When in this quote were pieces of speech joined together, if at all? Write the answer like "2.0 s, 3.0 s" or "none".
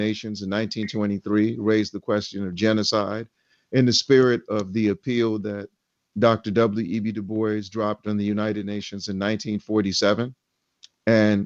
none